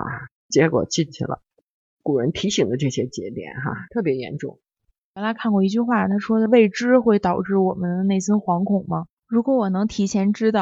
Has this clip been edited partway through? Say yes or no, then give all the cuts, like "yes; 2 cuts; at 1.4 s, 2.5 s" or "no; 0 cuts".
no; 0 cuts